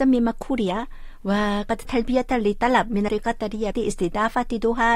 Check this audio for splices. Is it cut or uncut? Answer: cut